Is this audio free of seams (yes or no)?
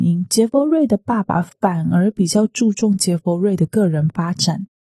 yes